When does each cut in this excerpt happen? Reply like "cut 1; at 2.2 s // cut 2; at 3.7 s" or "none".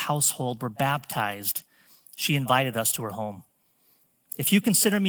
none